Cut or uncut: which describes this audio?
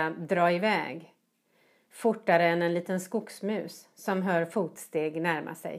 uncut